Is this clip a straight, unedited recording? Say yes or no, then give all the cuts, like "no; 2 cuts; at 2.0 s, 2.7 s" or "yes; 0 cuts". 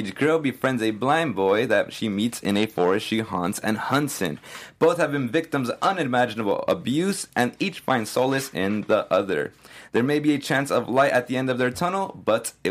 yes; 0 cuts